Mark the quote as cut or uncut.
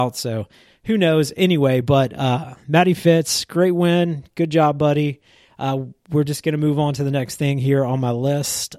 uncut